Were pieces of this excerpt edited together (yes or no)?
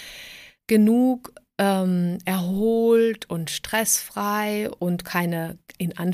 no